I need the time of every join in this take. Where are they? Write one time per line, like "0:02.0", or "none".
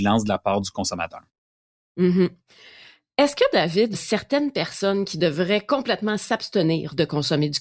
0:03.9